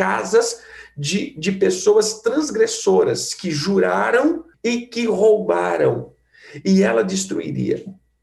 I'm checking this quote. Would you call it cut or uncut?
cut